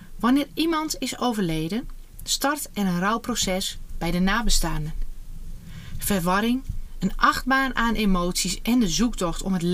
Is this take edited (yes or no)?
no